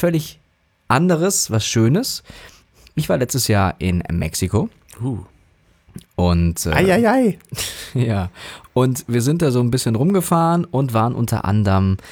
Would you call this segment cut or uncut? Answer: uncut